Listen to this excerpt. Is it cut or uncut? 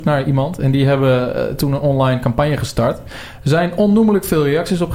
uncut